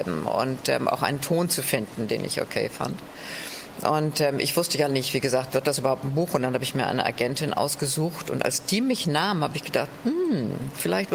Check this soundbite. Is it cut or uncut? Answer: cut